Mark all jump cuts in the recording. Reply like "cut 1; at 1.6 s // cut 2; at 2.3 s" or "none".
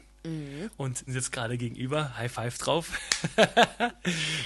cut 1; at 1.1 s

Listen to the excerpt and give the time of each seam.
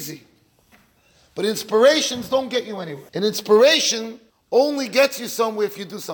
cut 1; at 3.1 s // cut 2; at 4.3 s

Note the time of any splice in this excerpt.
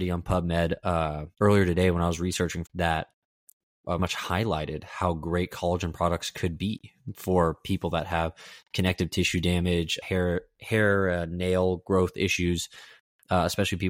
cut 1; at 1.3 s // cut 2; at 2.7 s // cut 3; at 4.0 s // cut 4; at 10.0 s

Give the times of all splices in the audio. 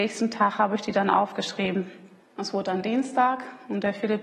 cut 1; at 2.2 s

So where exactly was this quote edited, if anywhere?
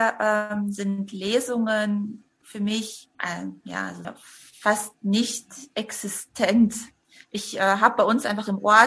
cut 1; at 3.1 s // cut 2; at 4.0 s

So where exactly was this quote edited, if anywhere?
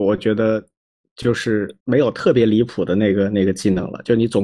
cut 1; at 1.8 s

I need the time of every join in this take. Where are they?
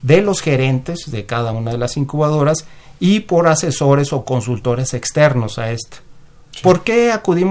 none

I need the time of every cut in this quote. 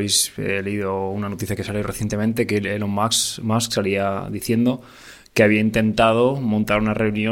none

